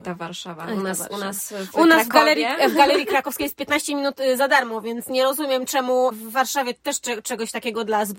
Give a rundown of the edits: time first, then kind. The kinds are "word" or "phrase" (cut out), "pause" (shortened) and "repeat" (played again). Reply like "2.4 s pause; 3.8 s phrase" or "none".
none